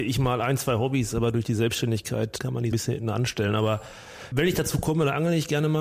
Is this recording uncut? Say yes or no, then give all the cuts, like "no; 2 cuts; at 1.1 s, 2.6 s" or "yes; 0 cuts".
no; 3 cuts; at 2.4 s, 2.7 s, 4.3 s